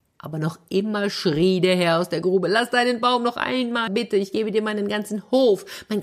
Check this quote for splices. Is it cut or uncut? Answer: cut